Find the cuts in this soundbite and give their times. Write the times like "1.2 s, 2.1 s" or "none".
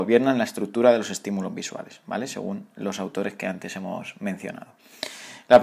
none